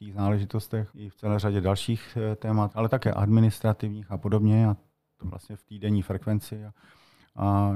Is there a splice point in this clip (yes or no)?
yes